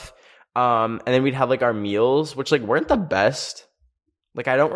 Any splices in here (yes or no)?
no